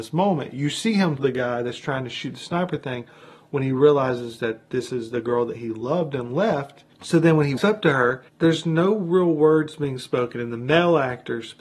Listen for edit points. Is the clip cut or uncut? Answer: cut